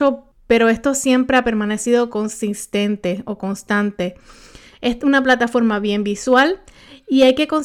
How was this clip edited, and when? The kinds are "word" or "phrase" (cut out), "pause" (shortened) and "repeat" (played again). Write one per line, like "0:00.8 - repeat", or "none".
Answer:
none